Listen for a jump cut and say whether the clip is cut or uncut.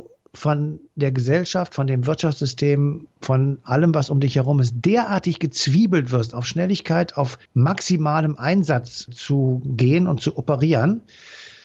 cut